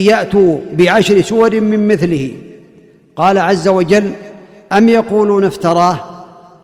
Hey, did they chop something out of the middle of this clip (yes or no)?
no